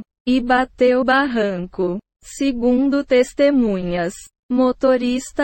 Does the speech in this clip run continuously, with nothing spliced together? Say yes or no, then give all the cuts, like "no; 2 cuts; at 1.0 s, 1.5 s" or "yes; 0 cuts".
no; 1 cut; at 1.0 s